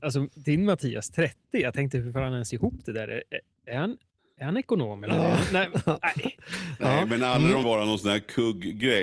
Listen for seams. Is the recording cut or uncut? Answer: cut